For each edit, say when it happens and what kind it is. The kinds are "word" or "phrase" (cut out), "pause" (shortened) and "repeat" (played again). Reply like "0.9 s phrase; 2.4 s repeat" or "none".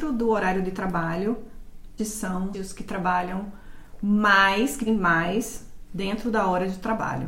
2.0 s word; 2.5 s word; 4.9 s word